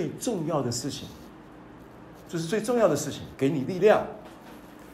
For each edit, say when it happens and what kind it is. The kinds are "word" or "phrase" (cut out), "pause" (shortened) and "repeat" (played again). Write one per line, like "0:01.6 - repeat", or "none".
0:01.5 - pause
0:03.3 - pause